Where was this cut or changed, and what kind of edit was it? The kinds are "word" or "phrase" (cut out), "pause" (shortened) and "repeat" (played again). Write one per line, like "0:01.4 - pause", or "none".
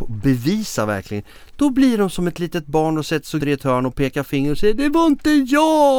0:03.4 - word